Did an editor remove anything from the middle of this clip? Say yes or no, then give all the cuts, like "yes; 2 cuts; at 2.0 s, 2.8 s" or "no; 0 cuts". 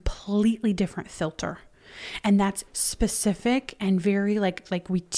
yes; 1 cut; at 2.7 s